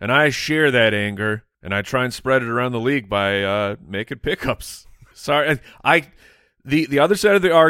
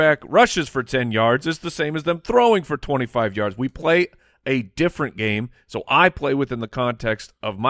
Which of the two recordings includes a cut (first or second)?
first